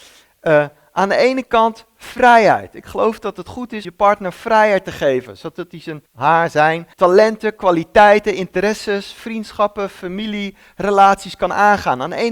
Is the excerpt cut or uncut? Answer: cut